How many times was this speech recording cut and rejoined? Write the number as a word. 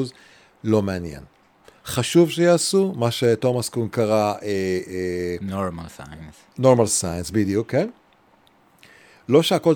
zero